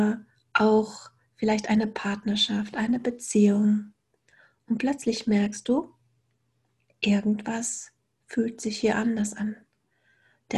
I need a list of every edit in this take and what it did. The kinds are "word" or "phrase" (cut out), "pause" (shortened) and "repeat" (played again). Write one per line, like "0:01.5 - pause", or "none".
none